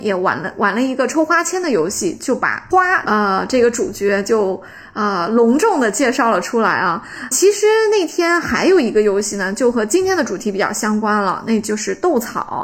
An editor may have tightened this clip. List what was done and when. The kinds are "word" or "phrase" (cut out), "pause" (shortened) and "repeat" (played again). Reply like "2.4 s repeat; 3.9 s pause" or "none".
7.3 s word